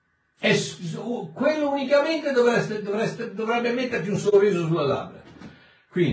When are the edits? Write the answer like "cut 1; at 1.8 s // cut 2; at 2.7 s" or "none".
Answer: none